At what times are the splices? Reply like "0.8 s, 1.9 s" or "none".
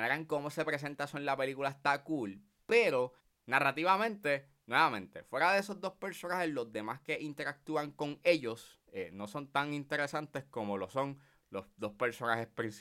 3.2 s